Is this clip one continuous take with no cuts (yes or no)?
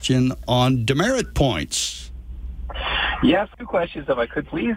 no